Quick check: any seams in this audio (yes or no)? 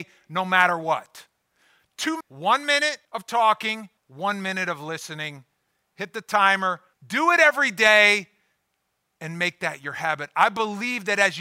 yes